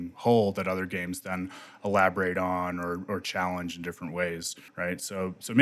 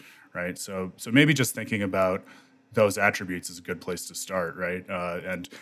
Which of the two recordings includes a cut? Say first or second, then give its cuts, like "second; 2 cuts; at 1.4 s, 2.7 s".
first; 1 cut; at 4.7 s